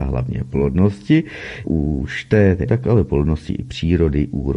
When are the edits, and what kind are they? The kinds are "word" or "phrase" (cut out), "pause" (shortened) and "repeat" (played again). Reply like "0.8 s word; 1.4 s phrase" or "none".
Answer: 1.6 s word; 2.7 s word